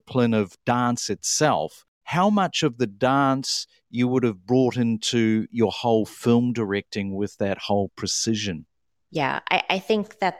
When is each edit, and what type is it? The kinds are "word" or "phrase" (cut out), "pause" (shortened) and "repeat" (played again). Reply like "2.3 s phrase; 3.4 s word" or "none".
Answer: none